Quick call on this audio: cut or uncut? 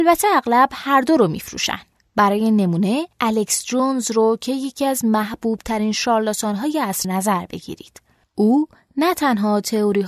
cut